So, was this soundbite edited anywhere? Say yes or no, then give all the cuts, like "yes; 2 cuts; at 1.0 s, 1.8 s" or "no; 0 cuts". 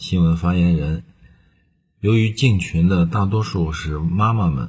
no; 0 cuts